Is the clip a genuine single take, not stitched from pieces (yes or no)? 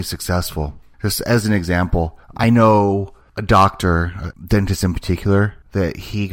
yes